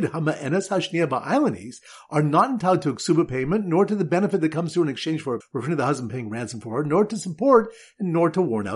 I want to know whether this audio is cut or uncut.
cut